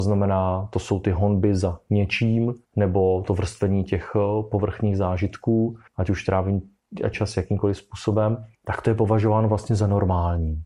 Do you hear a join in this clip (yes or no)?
yes